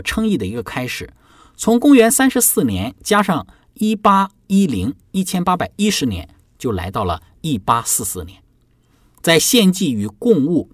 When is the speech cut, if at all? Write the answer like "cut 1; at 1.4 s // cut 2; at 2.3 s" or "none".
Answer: none